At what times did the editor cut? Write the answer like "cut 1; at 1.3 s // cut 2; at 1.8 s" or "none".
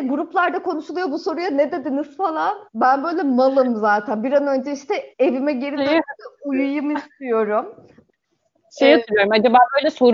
cut 1; at 2.7 s // cut 2; at 5.1 s